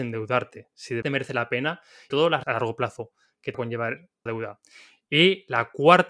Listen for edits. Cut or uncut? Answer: cut